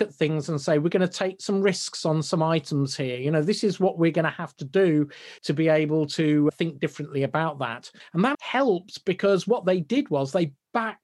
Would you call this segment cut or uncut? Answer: cut